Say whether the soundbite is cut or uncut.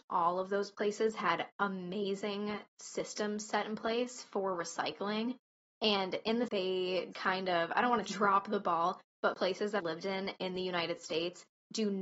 cut